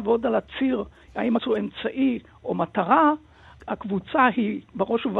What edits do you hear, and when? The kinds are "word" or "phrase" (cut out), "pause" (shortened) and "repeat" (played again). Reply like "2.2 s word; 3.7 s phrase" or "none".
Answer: 1.4 s word; 3.6 s word